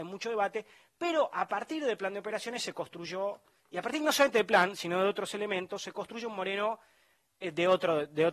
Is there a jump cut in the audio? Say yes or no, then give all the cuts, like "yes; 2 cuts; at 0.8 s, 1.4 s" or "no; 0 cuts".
no; 0 cuts